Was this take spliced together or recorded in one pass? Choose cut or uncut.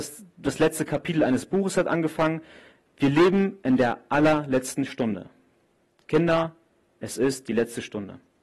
uncut